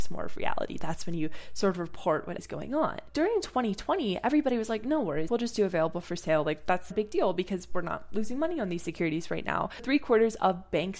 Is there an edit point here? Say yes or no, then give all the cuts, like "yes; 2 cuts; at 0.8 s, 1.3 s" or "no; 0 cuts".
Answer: yes; 3 cuts; at 2.4 s, 5.3 s, 6.9 s